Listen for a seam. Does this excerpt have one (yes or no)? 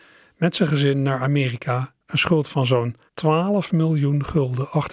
yes